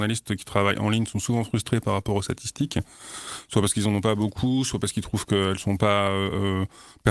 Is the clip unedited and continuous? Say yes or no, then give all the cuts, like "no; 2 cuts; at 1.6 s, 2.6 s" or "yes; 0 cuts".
yes; 0 cuts